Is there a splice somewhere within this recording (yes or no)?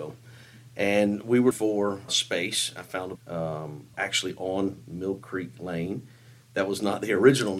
yes